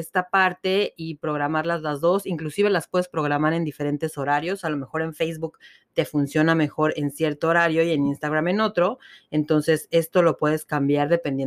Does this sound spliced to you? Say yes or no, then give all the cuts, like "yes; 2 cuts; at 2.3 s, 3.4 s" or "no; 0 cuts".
no; 0 cuts